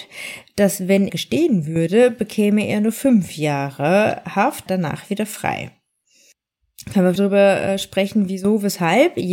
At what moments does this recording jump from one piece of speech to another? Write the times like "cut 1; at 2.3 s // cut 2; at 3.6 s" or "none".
cut 1; at 1.1 s // cut 2; at 4.7 s // cut 3; at 7.2 s